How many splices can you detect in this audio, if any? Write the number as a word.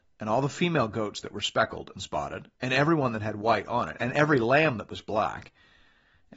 one